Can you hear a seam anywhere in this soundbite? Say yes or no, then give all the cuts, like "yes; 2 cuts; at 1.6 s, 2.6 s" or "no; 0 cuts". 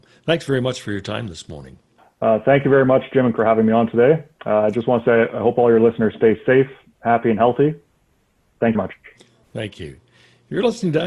yes; 3 cuts; at 2.0 s, 3.4 s, 8.7 s